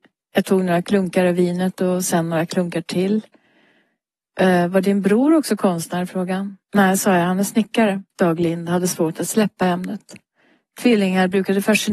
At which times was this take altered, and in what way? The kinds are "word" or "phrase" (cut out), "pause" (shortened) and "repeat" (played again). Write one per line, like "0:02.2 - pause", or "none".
0:06.6 - pause
0:08.1 - pause